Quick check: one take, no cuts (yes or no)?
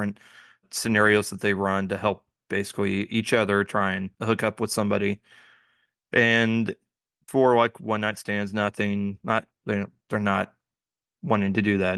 no